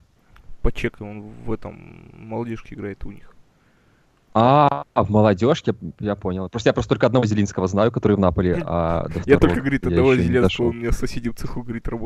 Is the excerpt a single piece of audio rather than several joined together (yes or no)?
yes